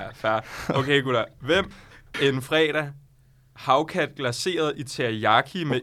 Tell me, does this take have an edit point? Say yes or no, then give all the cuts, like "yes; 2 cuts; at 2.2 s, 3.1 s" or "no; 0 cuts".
yes; 2 cuts; at 1.7 s, 2.1 s